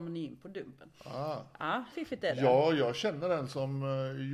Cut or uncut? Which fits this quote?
cut